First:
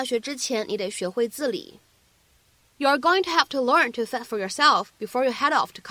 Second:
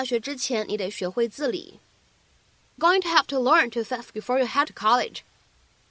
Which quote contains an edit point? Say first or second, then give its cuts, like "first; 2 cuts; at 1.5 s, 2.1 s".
second; 3 cuts; at 2.8 s, 4.1 s, 4.6 s